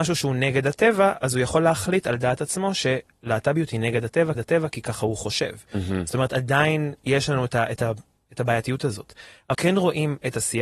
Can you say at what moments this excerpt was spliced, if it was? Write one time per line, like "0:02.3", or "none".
0:04.3
0:09.5